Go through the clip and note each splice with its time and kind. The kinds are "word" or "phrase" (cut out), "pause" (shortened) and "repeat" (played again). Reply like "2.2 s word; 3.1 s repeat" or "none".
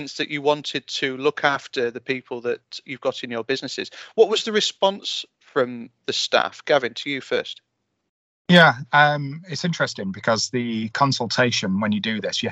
none